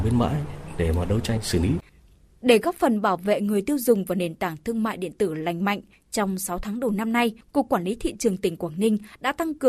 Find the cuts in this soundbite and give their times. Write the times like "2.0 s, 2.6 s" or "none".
none